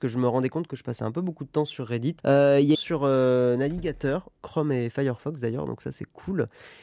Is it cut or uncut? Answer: cut